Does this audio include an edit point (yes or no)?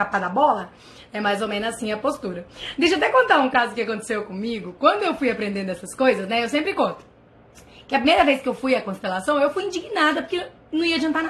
no